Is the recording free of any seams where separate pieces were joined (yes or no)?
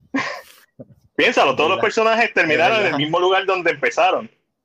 yes